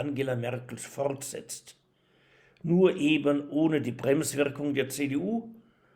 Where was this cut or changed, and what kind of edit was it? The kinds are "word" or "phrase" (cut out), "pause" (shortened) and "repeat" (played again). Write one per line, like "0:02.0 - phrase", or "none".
none